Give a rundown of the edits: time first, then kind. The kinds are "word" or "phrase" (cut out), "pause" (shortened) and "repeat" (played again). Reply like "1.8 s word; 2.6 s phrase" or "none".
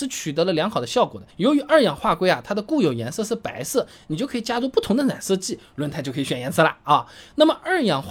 1.3 s pause